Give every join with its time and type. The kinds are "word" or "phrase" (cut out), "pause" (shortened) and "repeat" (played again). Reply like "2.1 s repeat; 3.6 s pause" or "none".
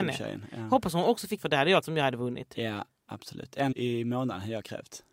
1.4 s word; 1.8 s word; 3.7 s word